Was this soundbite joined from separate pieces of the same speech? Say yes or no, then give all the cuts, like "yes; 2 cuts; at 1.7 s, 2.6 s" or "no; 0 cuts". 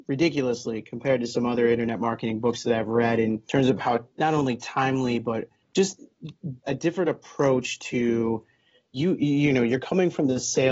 no; 0 cuts